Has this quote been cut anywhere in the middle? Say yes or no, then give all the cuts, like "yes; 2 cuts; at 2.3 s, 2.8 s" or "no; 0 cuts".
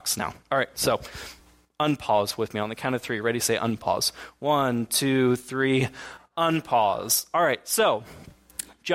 no; 0 cuts